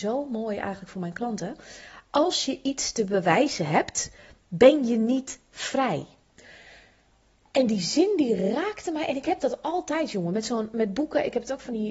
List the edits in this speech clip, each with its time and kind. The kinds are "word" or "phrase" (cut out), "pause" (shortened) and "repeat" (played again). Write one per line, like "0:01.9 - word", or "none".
none